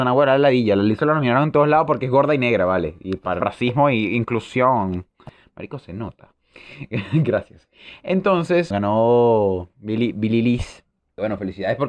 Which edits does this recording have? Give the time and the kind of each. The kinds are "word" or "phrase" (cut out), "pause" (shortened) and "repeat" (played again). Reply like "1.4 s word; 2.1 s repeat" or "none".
3.4 s word; 8.7 s word